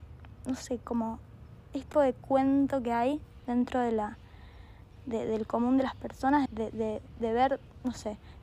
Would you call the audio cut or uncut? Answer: cut